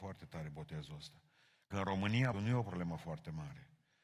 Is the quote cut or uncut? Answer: cut